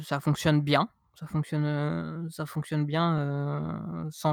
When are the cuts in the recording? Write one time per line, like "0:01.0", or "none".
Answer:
none